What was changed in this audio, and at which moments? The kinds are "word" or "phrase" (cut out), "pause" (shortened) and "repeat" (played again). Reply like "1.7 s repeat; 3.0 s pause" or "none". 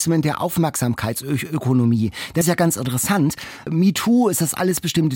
2.4 s word